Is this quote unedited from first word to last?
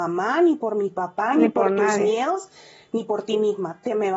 yes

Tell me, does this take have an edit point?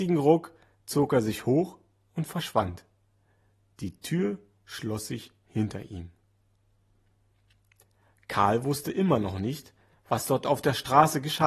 no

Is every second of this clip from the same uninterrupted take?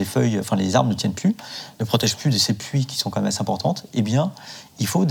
yes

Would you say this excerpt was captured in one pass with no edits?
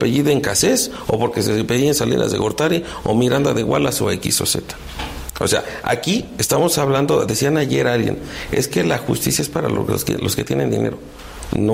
yes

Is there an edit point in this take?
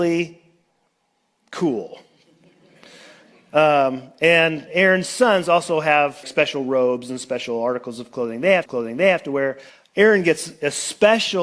yes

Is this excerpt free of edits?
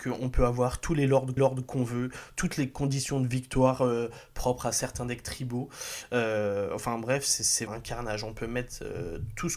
no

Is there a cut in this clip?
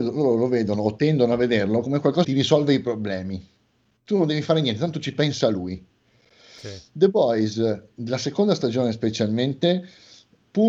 yes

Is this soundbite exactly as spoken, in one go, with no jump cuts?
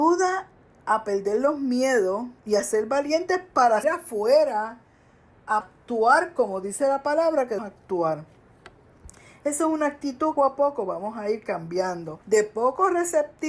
no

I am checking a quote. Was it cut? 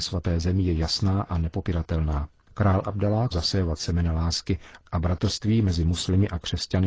yes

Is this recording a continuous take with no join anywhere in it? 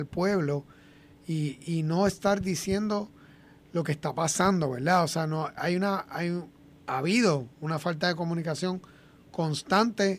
yes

